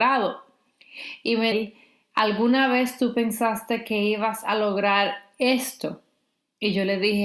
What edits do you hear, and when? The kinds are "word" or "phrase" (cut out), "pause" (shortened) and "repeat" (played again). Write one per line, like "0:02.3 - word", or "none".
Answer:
0:01.5 - word